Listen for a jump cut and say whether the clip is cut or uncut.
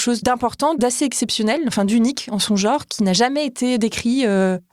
uncut